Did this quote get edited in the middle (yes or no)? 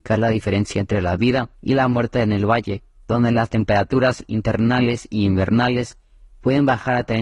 yes